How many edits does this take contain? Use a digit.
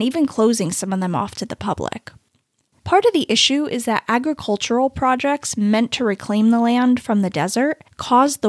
0